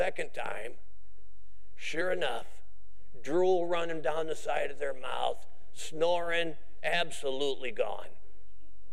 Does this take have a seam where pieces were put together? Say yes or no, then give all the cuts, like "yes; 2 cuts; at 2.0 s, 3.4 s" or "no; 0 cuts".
no; 0 cuts